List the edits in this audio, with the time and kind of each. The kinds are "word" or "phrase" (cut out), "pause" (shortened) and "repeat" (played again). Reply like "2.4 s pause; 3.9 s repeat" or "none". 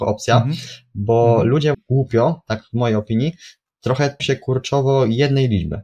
1.7 s word; 4.2 s word